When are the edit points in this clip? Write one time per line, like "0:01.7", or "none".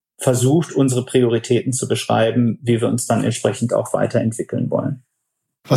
none